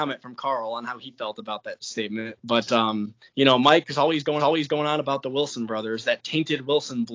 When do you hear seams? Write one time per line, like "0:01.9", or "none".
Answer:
0:03.3
0:04.4